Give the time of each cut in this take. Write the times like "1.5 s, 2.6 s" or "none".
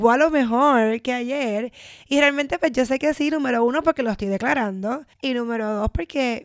5.1 s